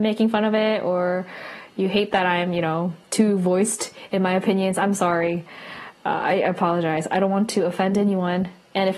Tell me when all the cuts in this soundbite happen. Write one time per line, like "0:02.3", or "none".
0:03.0